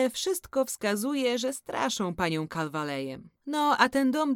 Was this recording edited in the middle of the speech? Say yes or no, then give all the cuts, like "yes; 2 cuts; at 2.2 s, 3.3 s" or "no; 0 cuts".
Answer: yes; 1 cut; at 3.4 s